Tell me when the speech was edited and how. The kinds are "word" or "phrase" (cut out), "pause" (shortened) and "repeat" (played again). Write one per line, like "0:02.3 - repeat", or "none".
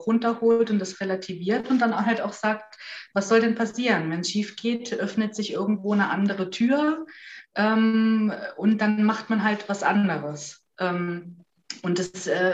none